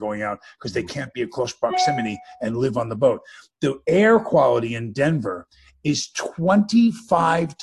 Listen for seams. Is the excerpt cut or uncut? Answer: uncut